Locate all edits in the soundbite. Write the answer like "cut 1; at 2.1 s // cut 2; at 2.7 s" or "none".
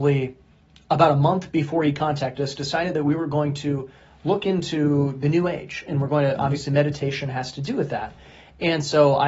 none